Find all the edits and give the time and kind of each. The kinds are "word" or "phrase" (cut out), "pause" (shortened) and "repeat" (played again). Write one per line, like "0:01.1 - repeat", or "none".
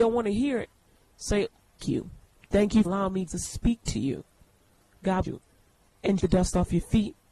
0:01.8 - word
0:02.8 - word
0:03.3 - word
0:05.2 - word
0:06.2 - word